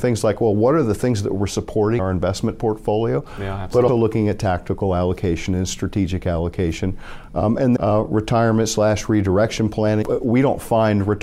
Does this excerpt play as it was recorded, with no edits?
no; 4 cuts; at 2.0 s, 3.9 s, 7.8 s, 10.0 s

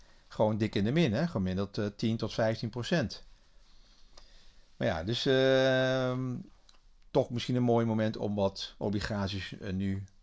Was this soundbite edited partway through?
no; 0 cuts

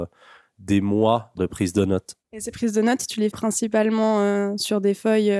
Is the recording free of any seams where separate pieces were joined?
no; 3 cuts; at 1.4 s, 2.2 s, 3.3 s

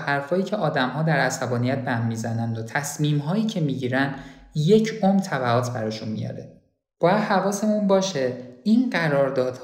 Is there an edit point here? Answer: no; 0 cuts

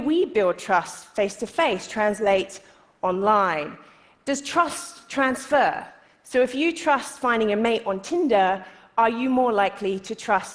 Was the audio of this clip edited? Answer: no; 0 cuts

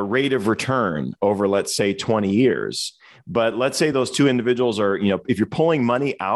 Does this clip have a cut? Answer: no; 0 cuts

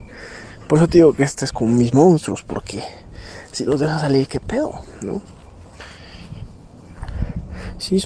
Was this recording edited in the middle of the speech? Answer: no; 0 cuts

